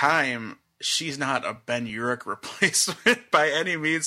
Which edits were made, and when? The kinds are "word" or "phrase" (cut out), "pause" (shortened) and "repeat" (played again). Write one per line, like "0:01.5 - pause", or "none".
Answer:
none